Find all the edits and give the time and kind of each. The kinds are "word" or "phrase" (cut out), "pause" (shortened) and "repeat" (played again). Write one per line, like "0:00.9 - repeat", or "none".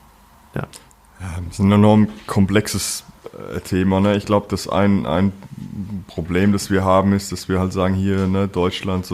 none